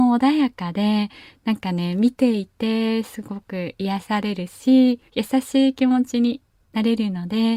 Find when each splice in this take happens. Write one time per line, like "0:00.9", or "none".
0:05.1